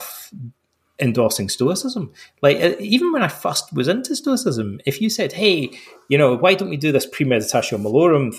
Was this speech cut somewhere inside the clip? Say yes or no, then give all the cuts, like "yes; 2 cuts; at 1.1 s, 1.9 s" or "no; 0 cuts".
no; 0 cuts